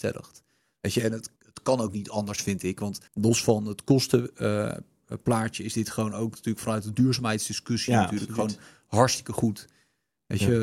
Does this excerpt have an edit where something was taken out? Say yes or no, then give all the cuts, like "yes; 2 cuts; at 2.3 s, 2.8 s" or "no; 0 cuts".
yes; 2 cuts; at 1.4 s, 3.1 s